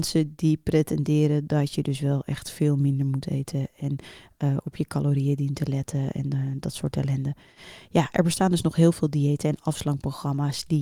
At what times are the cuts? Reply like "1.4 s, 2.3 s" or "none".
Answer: none